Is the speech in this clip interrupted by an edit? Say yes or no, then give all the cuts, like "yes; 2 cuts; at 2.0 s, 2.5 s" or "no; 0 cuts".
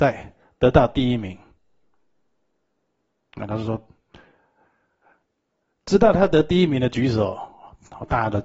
no; 0 cuts